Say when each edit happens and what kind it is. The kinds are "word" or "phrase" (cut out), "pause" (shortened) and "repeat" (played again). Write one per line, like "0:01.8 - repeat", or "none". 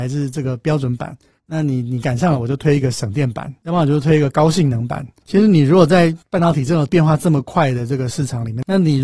none